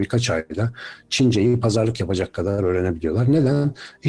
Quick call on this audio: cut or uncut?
uncut